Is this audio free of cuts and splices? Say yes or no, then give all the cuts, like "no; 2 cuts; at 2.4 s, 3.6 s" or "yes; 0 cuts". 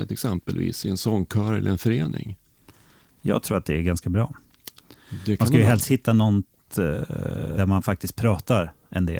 no; 1 cut; at 7.6 s